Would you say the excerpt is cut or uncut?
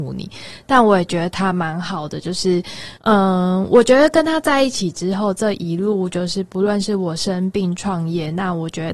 cut